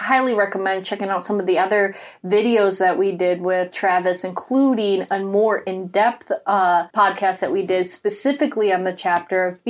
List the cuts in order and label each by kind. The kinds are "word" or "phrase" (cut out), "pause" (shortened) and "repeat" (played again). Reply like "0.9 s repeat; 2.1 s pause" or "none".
3.7 s word; 6.9 s pause